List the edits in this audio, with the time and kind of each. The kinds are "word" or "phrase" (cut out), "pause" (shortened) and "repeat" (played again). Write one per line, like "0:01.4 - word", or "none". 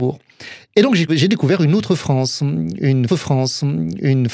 0:01.1 - word
0:03.1 - repeat